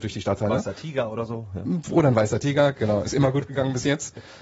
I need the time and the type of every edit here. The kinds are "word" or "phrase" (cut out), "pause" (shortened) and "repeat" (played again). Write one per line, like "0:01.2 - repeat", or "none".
none